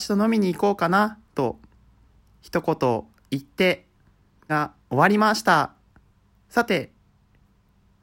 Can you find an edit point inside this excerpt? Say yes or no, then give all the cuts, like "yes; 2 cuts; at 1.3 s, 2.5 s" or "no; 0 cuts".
yes; 2 cuts; at 1.3 s, 4.5 s